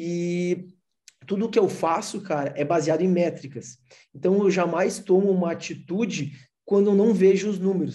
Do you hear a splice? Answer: no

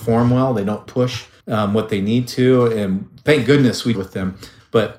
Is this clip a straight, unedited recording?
no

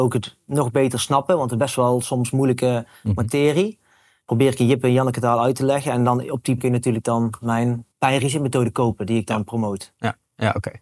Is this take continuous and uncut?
no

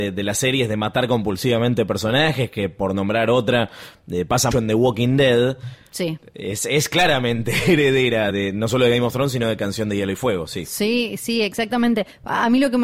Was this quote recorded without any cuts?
no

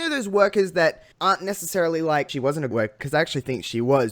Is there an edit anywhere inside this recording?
yes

